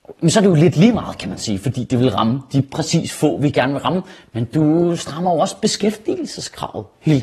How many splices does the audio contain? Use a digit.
0